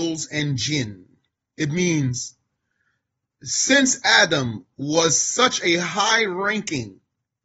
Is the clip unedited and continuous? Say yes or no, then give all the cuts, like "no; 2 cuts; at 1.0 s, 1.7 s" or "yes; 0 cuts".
yes; 0 cuts